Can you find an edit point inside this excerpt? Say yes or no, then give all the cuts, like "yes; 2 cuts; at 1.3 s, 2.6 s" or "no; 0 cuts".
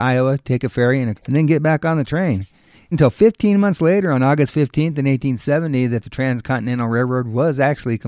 yes; 2 cuts; at 1.2 s, 2.9 s